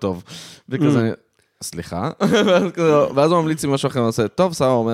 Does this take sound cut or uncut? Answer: uncut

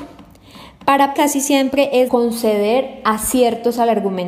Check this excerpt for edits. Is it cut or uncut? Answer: cut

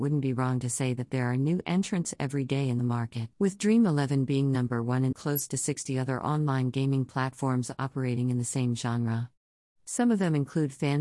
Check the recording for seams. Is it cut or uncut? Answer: cut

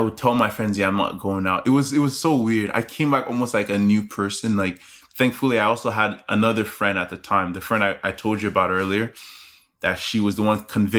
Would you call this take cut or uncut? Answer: uncut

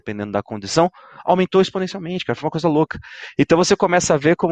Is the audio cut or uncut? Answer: uncut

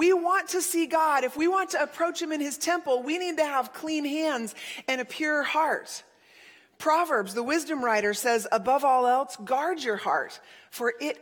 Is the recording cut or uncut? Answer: uncut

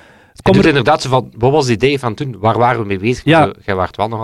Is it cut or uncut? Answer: uncut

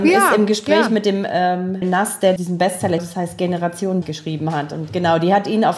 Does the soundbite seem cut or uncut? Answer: cut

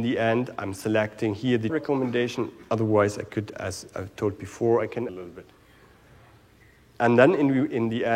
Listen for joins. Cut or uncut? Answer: cut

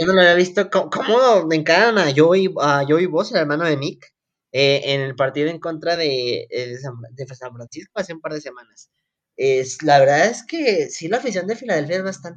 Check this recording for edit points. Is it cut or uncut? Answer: uncut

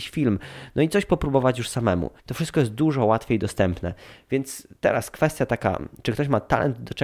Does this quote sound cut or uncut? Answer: cut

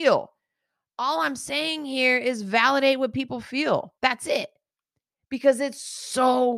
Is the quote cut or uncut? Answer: cut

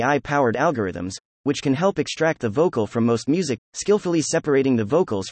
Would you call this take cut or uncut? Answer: cut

